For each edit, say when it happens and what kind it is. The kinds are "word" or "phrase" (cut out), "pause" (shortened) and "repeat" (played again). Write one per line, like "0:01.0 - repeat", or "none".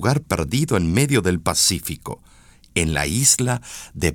none